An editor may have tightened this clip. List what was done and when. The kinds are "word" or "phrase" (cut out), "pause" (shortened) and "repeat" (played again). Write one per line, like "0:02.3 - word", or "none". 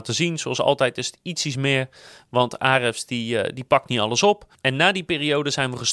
none